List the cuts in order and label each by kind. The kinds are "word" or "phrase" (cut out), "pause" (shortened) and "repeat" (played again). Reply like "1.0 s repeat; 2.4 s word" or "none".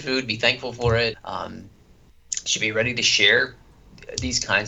1.1 s word